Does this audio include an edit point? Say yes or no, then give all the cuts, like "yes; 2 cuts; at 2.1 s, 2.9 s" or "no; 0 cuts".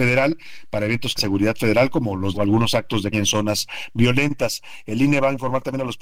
yes; 3 cuts; at 1.2 s, 2.3 s, 3.1 s